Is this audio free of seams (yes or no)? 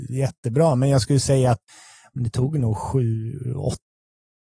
yes